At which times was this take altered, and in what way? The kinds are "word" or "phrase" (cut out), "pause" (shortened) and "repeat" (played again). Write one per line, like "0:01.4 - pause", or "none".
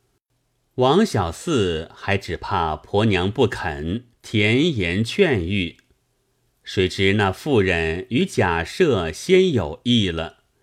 0:04.2 - pause

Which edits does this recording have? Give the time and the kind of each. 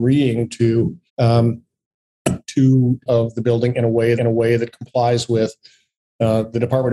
0:01.1 - pause
0:03.1 - phrase
0:04.2 - repeat

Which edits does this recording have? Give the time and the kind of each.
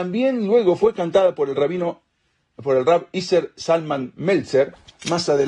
none

